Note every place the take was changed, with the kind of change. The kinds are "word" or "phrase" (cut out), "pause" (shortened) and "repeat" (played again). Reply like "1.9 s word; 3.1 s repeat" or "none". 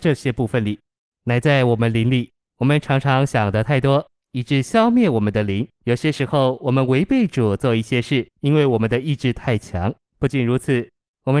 2.4 s pause; 5.7 s pause; 8.3 s pause; 10.0 s pause

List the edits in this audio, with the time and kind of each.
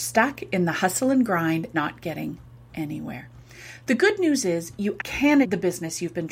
1.7 s word; 5.0 s word; 5.4 s word

